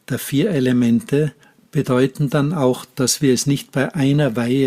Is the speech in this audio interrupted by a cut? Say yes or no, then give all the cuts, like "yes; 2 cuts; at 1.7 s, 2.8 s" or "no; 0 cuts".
no; 0 cuts